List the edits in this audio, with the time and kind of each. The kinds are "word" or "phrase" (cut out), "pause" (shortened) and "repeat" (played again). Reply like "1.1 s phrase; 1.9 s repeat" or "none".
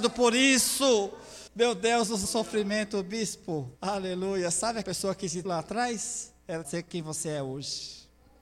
1.5 s pause; 2.2 s word; 3.8 s pause; 4.8 s word; 5.4 s word; 6.6 s phrase